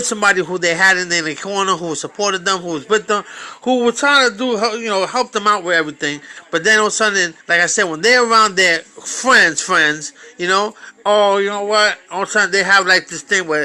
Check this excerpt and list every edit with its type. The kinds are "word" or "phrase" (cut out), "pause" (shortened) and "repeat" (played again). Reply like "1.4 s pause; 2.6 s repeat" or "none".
7.4 s pause